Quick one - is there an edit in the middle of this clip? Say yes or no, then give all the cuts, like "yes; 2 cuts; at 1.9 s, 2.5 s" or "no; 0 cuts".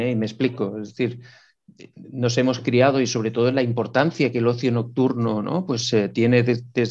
no; 0 cuts